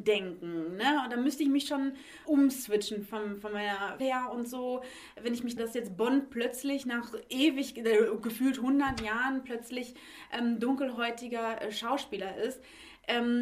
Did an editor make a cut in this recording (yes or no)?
yes